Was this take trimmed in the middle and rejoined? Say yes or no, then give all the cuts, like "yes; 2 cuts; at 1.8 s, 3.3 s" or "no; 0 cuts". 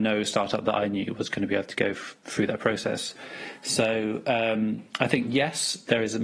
no; 0 cuts